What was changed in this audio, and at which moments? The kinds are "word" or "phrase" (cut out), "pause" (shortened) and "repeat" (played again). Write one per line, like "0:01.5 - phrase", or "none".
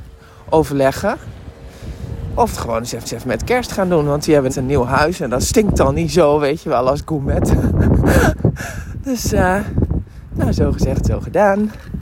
0:02.5 - phrase
0:03.0 - repeat
0:04.5 - word

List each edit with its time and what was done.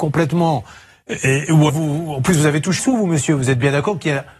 0:01.7 - word
0:02.8 - word

